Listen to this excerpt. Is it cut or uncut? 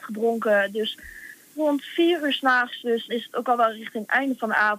cut